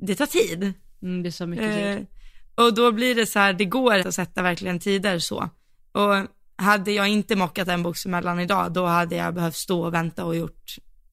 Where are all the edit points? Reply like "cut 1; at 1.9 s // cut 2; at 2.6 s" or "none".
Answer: cut 1; at 4.0 s